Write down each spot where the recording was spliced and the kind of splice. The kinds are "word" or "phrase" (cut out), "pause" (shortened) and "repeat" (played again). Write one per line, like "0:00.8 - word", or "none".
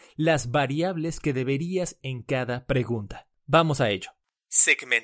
0:02.0 - word
0:03.4 - pause